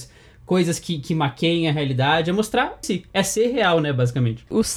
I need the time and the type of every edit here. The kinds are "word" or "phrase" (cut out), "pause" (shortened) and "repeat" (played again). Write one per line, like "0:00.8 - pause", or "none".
0:02.8 - phrase